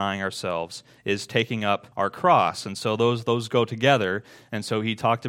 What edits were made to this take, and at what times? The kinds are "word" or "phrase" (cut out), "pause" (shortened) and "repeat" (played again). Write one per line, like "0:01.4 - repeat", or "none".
0:01.9 - pause